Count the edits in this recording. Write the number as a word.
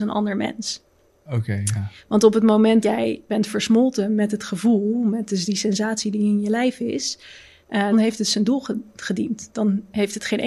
three